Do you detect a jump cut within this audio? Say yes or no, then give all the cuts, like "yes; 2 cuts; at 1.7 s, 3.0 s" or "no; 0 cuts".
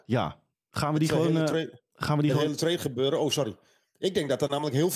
no; 0 cuts